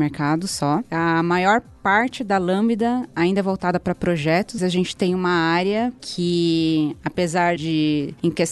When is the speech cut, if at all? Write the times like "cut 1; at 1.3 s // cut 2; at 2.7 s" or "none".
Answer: cut 1; at 4.6 s // cut 2; at 7.6 s